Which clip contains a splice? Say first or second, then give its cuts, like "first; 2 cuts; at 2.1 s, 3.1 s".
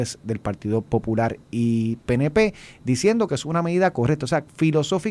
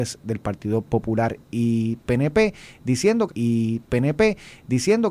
second; 1 cut; at 3.3 s